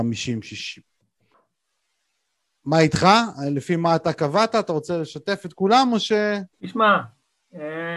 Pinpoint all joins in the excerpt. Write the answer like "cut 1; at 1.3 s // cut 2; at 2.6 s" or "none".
cut 1; at 6.5 s